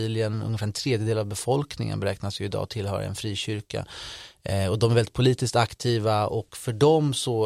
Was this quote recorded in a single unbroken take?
yes; 0 cuts

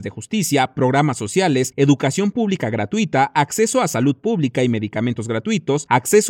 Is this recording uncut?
yes; 0 cuts

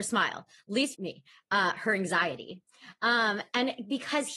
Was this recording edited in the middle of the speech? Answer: yes; 1 cut; at 0.9 s

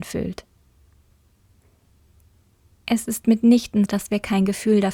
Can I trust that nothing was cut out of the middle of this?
no; 1 cut; at 3.9 s

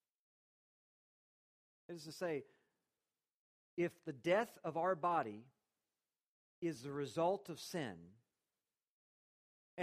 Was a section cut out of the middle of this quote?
no; 0 cuts

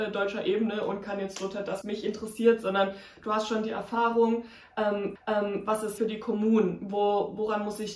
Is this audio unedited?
no; 3 cuts; at 1.8 s, 5.2 s, 6.0 s

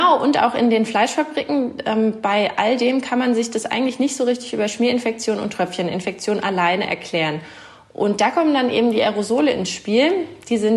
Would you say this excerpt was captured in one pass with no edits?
yes; 0 cuts

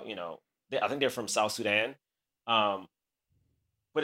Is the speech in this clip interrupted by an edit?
no; 0 cuts

